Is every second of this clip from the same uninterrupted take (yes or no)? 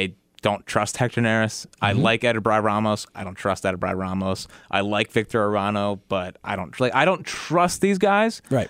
yes